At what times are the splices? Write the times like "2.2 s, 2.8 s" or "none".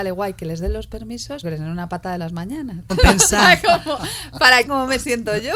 1.4 s, 2.2 s, 2.9 s, 4.7 s